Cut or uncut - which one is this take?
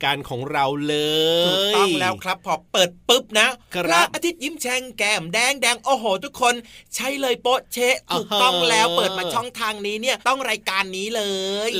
cut